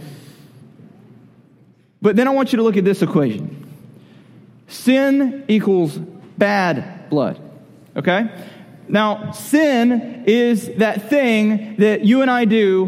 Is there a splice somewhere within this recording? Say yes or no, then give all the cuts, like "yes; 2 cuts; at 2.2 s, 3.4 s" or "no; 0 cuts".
no; 0 cuts